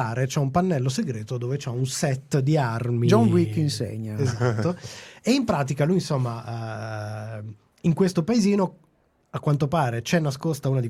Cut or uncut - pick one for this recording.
uncut